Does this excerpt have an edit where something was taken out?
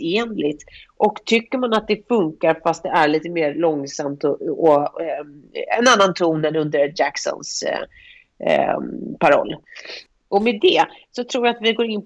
no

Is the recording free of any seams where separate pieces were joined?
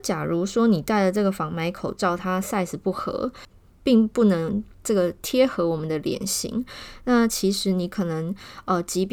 yes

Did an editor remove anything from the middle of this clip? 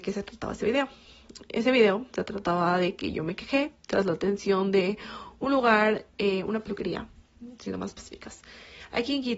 no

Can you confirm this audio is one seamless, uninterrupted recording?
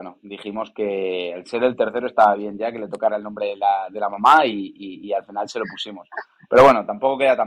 yes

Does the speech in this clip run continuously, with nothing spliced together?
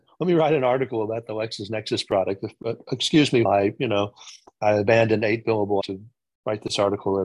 no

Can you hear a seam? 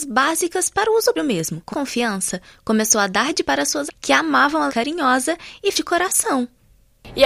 yes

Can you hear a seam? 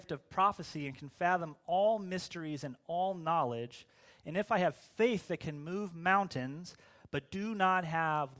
no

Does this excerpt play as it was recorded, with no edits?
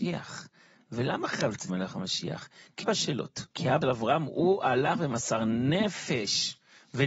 no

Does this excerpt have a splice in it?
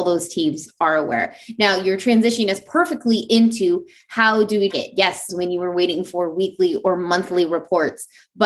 yes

